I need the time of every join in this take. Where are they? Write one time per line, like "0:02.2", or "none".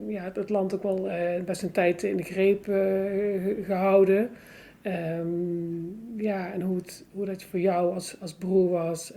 none

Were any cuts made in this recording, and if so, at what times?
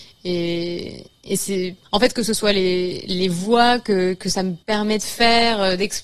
0:01.8
0:04.6

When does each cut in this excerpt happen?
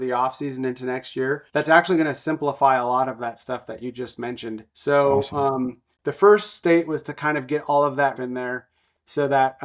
0:01.5
0:04.7
0:08.2

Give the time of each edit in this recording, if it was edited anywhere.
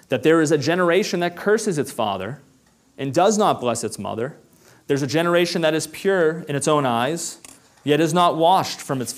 none

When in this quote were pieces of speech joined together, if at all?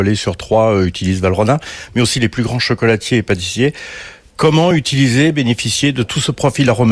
none

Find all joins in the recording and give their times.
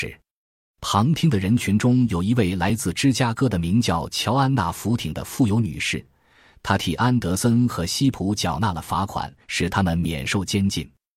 0:09.4

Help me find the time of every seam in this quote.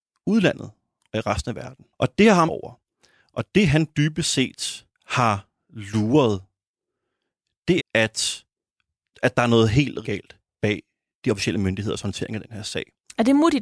0:01.9
0:02.5
0:04.9
0:07.8
0:10.0

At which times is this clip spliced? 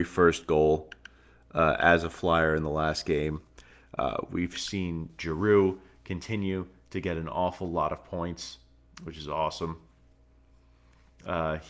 none

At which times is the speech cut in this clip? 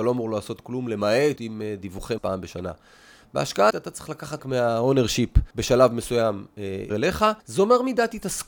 0:01.4
0:02.2
0:03.7
0:04.4
0:05.5
0:06.9
0:07.4

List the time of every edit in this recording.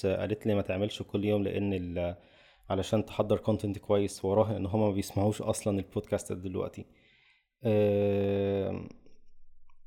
none

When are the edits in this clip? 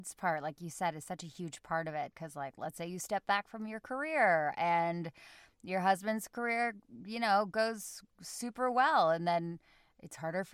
none

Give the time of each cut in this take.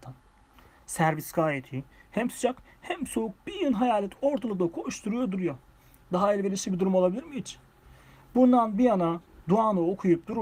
none

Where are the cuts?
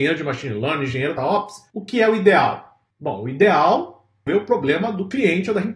0:01.2
0:01.7
0:02.9
0:04.3

